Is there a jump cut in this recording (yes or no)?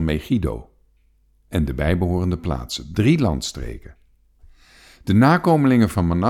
no